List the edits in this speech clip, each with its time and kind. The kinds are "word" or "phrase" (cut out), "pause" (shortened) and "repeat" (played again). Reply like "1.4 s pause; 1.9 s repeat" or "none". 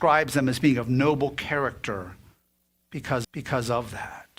3.2 s repeat

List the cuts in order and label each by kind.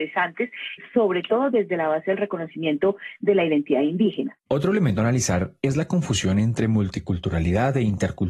none

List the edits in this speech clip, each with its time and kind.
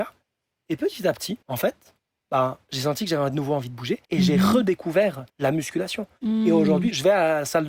1.4 s pause; 2.1 s pause; 4.0 s pause; 5.3 s pause

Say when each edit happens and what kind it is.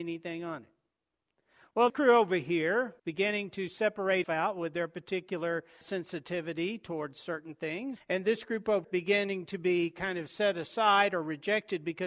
1.9 s word; 3.0 s pause; 4.2 s word; 5.8 s word; 8.0 s word; 8.8 s word

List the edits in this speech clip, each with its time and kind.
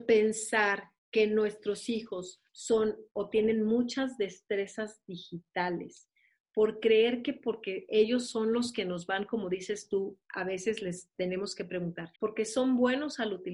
1.0 s pause; 2.5 s pause; 12.2 s pause

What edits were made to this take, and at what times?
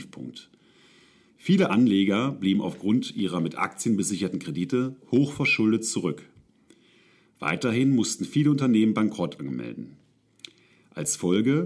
none

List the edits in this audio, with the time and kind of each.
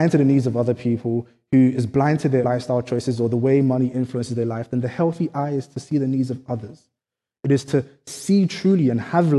2.4 s word

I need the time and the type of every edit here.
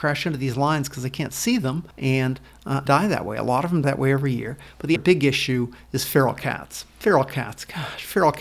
1.9 s pause; 2.9 s word; 3.8 s word; 5.0 s word

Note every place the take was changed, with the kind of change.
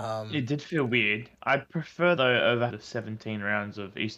2.2 s word; 2.7 s word

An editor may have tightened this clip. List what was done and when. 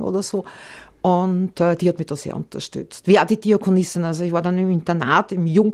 none

